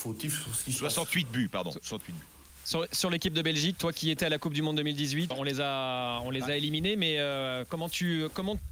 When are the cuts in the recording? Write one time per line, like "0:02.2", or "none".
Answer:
0:05.3